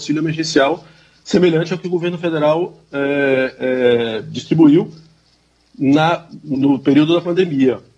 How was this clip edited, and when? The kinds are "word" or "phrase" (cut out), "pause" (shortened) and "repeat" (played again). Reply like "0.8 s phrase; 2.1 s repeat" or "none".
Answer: 6.5 s word